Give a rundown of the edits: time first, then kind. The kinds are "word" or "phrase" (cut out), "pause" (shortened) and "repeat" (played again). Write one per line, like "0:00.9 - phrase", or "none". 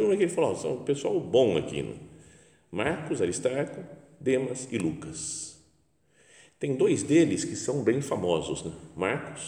none